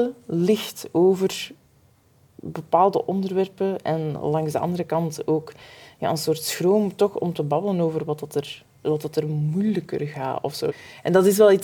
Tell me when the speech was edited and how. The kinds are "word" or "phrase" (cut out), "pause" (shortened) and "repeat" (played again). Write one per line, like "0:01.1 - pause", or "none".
none